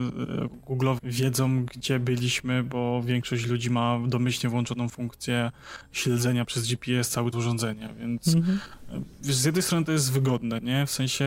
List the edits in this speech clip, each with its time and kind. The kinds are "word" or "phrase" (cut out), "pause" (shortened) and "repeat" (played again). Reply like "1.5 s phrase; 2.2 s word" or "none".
1.0 s word; 7.3 s word

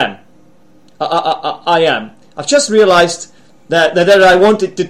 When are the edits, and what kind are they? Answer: none

